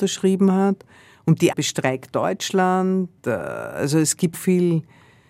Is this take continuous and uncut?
no; 3 cuts; at 1.5 s, 3.2 s, 4.3 s

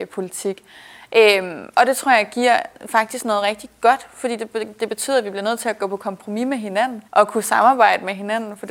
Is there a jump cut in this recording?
yes; 1 cut; at 7.1 s

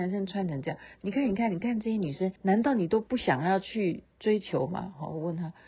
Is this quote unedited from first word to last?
no; 2 cuts; at 2.4 s, 4.1 s

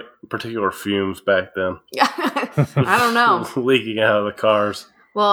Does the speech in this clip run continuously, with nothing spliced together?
yes; 0 cuts

